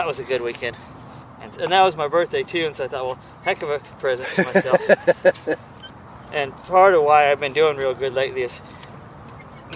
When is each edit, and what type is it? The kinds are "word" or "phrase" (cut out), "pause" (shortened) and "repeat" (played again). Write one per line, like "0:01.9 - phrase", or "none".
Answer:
0:04.0 - phrase

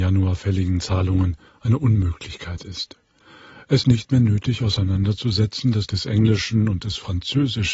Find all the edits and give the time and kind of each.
0:01.5 - pause
0:03.8 - word
0:05.9 - phrase

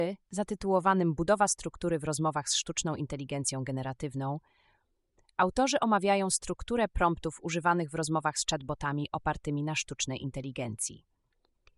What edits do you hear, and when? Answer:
none

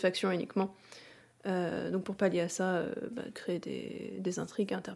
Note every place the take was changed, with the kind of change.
0:03.3 - word

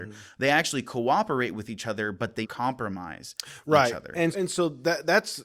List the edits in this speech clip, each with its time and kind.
0:02.4 - word
0:04.3 - word

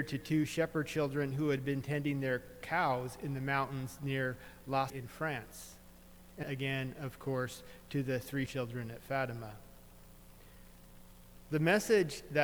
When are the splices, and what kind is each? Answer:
0:04.9 - word
0:06.4 - word
0:08.5 - word

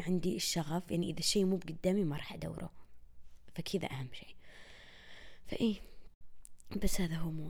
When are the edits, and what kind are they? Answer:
none

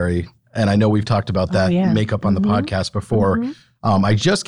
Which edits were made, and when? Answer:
none

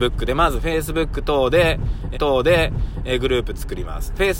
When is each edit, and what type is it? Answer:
0:02.1 - repeat

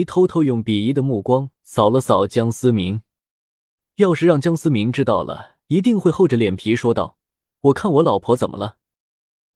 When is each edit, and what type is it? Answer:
0:05.6 - pause

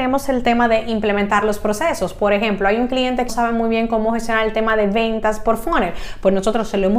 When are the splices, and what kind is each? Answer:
0:03.3 - word

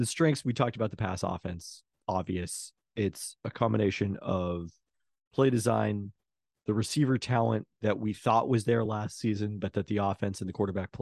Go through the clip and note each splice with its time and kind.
none

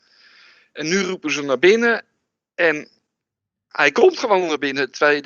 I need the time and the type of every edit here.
none

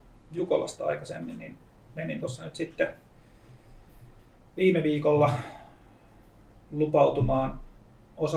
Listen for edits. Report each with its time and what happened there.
none

